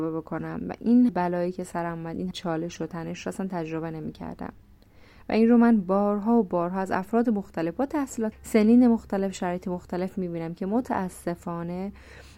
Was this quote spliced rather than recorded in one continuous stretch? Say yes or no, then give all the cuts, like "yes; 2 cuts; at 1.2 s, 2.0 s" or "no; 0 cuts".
yes; 3 cuts; at 1.1 s, 2.3 s, 8.3 s